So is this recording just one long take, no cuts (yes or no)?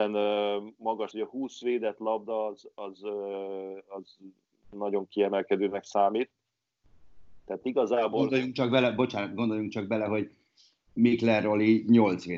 no